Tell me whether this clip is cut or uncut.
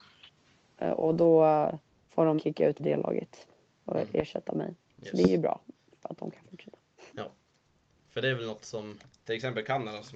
cut